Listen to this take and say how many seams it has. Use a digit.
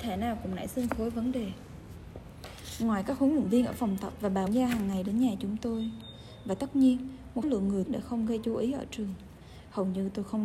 3